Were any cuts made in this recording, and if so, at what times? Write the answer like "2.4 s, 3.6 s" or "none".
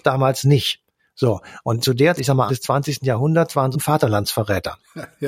1.8 s, 2.2 s, 2.5 s, 3.7 s